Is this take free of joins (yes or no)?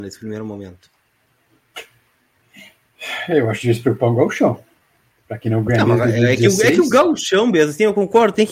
yes